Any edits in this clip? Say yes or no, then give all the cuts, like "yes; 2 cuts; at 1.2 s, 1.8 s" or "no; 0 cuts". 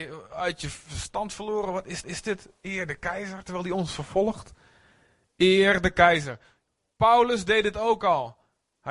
yes; 1 cut; at 2.0 s